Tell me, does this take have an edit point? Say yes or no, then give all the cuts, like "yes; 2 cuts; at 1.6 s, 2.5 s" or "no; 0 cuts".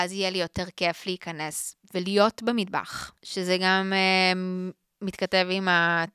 yes; 2 cuts; at 1.8 s, 4.8 s